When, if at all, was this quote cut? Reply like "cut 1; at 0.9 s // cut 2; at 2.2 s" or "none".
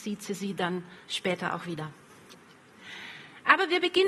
cut 1; at 1.0 s